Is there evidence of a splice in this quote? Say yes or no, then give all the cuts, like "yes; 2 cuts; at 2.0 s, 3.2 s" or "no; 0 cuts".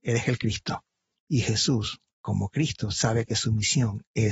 yes; 1 cut; at 2.1 s